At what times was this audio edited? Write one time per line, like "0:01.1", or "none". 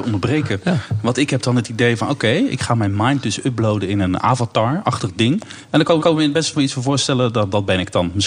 0:06.0

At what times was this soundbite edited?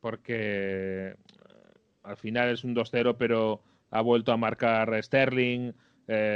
none

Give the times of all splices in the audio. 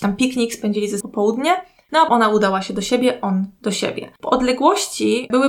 0:01.0
0:02.1
0:04.2

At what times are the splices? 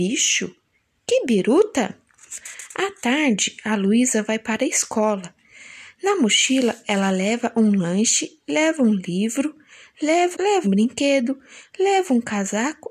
0:10.3
0:10.6

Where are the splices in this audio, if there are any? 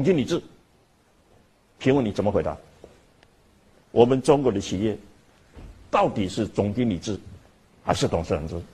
0:03.1

